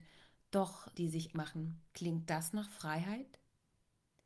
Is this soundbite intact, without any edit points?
no; 3 cuts; at 0.9 s, 1.3 s, 1.9 s

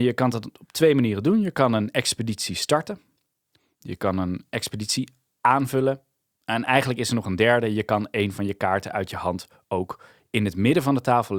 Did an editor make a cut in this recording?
no; 0 cuts

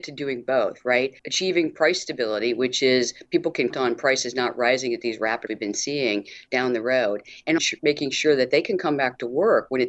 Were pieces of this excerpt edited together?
yes; 4 cuts; at 1.2 s, 3.7 s, 5.5 s, 7.6 s

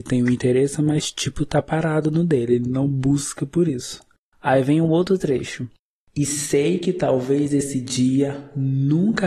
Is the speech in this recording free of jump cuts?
yes; 0 cuts

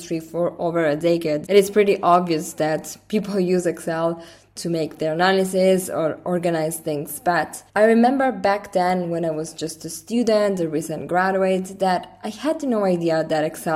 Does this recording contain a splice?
yes; 2 cuts; at 1.4 s, 7.7 s

